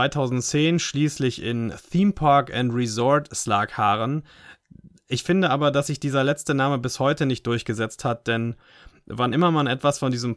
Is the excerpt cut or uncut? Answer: uncut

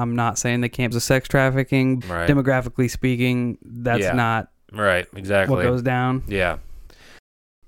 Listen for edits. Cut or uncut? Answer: cut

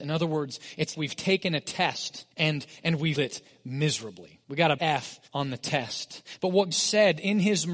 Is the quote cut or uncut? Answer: cut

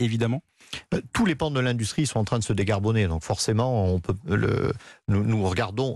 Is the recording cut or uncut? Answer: uncut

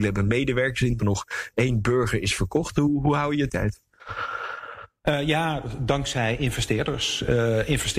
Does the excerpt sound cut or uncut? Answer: cut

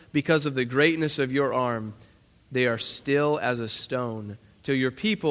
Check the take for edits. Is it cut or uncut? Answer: uncut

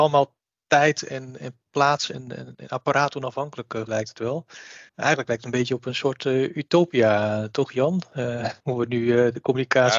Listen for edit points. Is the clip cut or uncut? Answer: cut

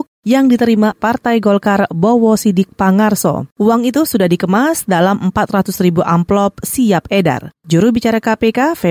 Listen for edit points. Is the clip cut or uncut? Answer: cut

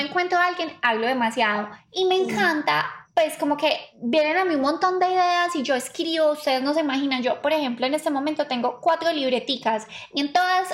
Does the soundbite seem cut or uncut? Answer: uncut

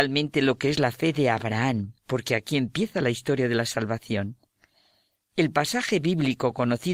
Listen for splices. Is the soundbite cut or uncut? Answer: cut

